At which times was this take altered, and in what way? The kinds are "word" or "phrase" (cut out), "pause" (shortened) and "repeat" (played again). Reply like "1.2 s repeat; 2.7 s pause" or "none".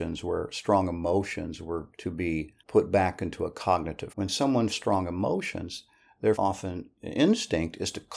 1.9 s pause; 2.6 s pause; 4.1 s word; 4.7 s word; 6.3 s word